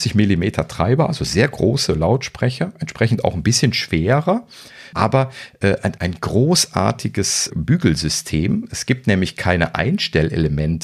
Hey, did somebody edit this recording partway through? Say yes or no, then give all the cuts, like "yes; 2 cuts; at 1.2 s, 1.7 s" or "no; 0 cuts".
yes; 3 cuts; at 4.9 s, 6.0 s, 7.5 s